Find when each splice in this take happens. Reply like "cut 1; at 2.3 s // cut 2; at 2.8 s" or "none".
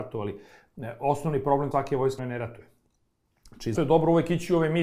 cut 1; at 1.7 s // cut 2; at 2.2 s // cut 3; at 3.7 s

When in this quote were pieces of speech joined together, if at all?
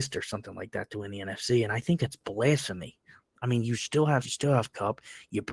cut 1; at 4.2 s

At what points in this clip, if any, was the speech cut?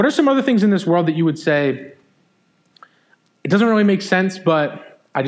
none

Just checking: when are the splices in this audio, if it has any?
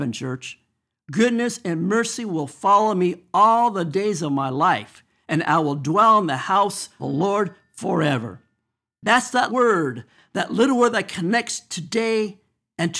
cut 1; at 7.0 s // cut 2; at 9.5 s

